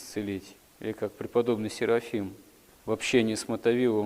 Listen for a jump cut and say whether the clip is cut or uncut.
uncut